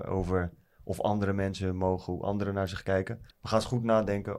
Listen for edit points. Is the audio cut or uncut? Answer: cut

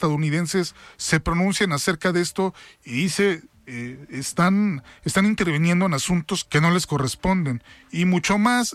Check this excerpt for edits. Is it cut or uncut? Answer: cut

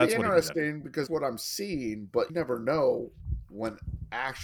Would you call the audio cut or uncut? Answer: cut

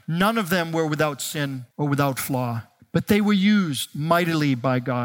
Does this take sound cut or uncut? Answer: cut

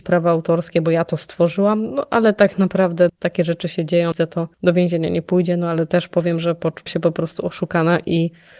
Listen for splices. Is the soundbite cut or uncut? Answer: cut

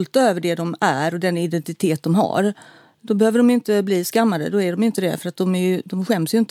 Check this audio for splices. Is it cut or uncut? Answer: uncut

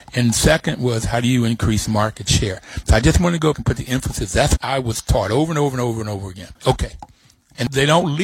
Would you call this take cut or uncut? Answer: cut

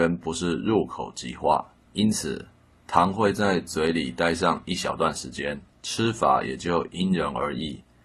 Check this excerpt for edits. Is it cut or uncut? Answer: cut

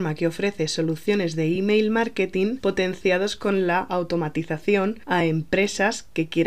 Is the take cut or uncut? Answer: uncut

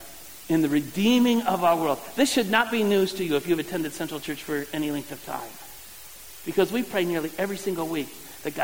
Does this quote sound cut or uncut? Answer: uncut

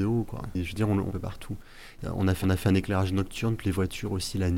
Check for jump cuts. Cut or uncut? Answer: cut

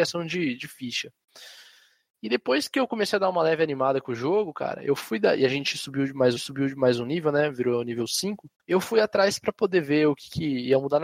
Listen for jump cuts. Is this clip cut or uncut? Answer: cut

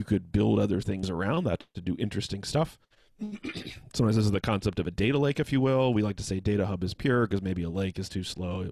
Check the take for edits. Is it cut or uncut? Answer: cut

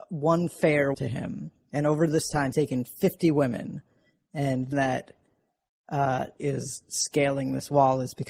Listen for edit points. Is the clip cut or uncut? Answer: cut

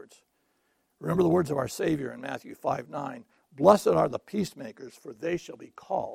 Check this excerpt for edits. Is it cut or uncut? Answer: uncut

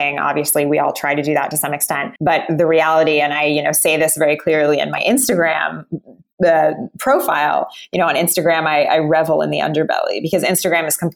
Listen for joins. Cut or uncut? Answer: cut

